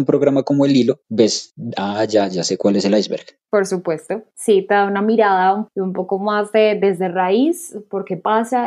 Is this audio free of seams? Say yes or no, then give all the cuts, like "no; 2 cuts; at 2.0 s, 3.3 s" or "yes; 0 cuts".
yes; 0 cuts